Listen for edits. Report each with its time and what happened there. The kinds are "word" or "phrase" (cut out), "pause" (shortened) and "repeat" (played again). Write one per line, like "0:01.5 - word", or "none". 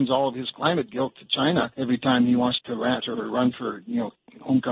0:01.7 - pause
0:02.6 - word
0:03.1 - word